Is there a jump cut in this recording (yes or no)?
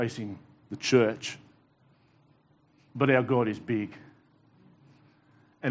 no